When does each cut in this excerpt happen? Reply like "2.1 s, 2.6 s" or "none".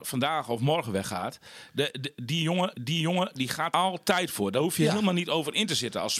2.7 s, 3.7 s